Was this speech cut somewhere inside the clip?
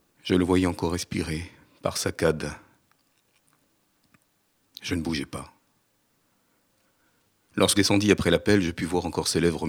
yes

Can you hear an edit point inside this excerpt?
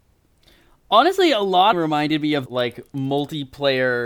yes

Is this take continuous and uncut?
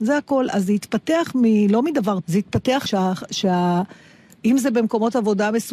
no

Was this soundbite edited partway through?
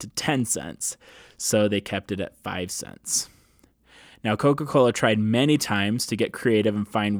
no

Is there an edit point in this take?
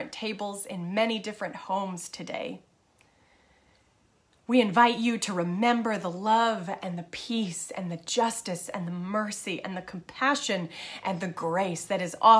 no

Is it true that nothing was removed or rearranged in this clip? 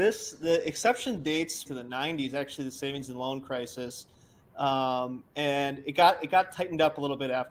no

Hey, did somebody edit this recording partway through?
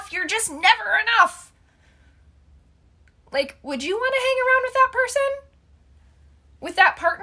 no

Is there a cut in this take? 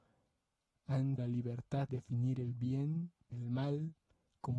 yes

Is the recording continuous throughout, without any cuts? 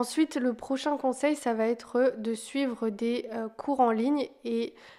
yes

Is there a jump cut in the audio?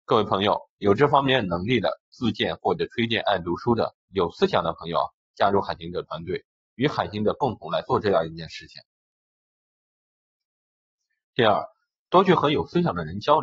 yes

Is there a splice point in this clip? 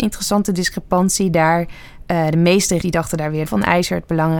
yes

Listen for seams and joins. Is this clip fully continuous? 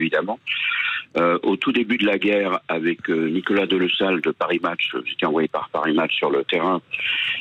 yes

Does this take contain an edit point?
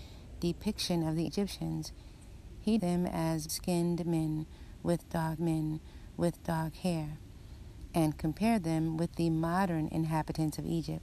yes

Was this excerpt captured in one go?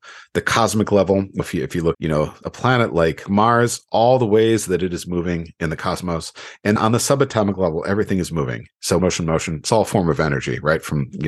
no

